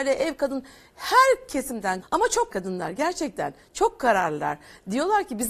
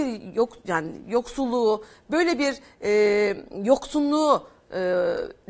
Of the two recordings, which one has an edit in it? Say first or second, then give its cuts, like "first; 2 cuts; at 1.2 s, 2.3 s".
first; 2 cuts; at 2.0 s, 2.5 s